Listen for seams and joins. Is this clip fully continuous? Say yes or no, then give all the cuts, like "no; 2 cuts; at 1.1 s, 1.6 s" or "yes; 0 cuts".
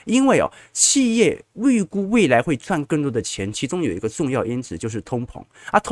no; 1 cut; at 1.5 s